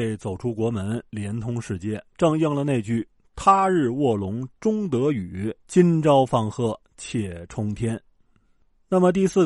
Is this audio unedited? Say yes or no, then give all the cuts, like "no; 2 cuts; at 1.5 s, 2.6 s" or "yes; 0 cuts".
no; 2 cuts; at 2.1 s, 5.6 s